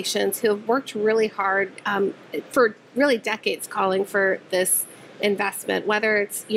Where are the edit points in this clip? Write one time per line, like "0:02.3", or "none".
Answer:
none